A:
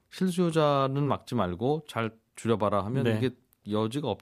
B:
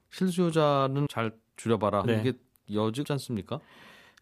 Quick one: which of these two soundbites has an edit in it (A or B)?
B